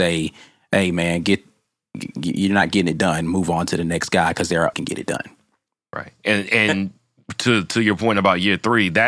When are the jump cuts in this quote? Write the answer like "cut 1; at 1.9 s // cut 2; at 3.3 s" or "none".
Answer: cut 1; at 4.7 s